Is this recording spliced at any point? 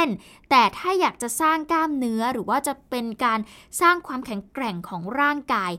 no; 0 cuts

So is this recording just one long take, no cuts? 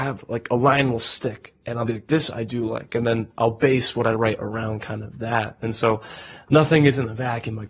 yes; 0 cuts

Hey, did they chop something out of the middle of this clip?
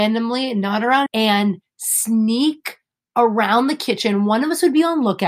yes; 1 cut; at 1.1 s

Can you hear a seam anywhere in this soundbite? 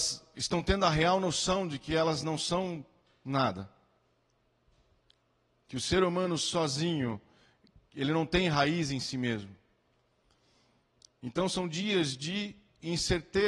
no; 0 cuts

